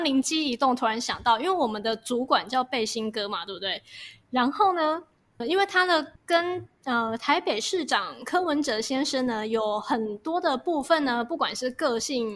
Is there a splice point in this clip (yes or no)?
yes